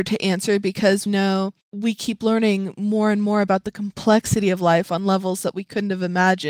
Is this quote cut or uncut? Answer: cut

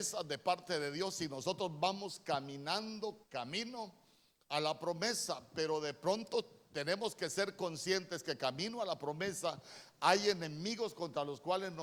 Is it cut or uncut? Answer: cut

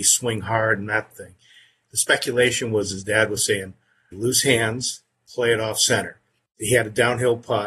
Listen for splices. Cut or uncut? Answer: cut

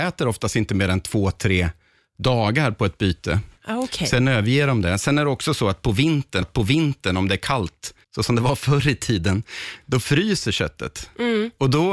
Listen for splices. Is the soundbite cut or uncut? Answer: cut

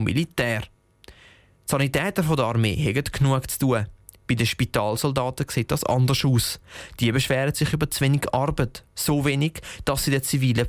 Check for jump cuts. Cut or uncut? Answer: uncut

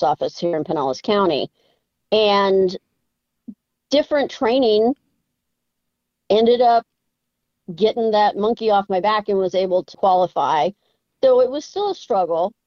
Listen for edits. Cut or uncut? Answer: cut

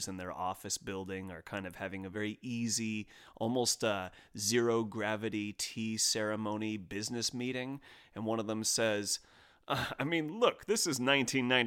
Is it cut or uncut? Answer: uncut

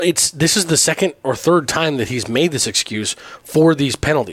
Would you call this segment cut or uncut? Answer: uncut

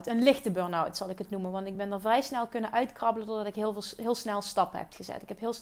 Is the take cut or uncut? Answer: uncut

